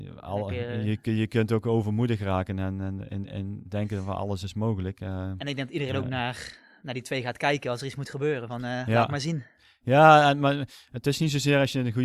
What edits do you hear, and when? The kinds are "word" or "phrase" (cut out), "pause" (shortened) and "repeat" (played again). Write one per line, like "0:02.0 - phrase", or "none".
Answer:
none